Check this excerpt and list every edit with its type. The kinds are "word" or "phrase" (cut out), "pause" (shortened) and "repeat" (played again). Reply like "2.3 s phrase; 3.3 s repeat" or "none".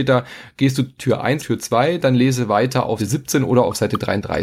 1.0 s word; 1.4 s word; 3.0 s word